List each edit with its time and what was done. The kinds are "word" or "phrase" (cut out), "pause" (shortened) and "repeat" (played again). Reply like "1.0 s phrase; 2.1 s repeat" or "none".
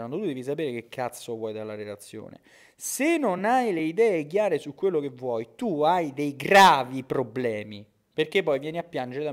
none

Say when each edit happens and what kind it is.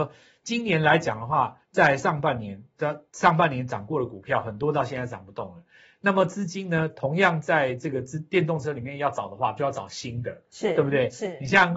1.6 s pause

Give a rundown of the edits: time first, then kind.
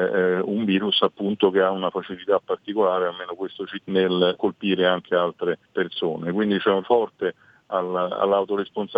3.8 s word; 4.3 s word; 5.6 s pause; 6.8 s word

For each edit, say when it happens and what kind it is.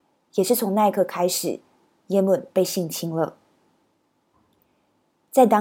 none

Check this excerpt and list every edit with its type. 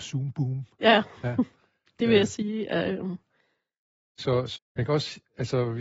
4.6 s word

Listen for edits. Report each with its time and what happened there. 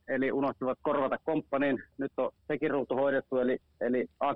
2.4 s pause

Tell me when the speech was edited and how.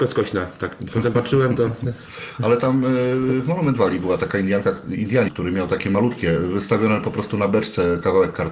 5.3 s word

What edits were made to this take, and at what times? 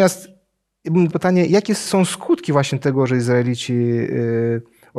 1.1 s phrase; 1.9 s word

